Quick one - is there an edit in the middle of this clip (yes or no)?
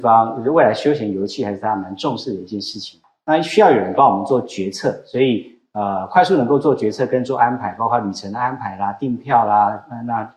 no